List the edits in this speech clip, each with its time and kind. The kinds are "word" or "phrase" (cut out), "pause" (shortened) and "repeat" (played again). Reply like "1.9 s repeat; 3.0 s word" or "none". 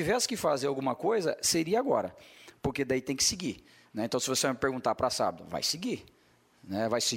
none